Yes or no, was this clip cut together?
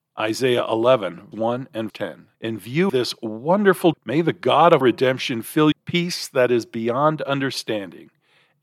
yes